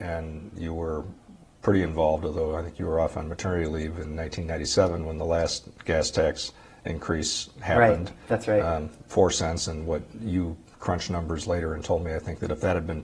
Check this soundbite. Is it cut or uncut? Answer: uncut